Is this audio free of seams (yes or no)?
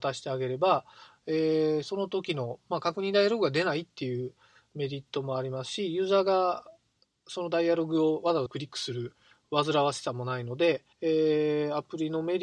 no